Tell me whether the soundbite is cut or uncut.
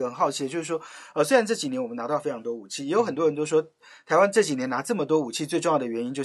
uncut